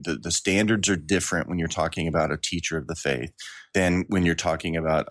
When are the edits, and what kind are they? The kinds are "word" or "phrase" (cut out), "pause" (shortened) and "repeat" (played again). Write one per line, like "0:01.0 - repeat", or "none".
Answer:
none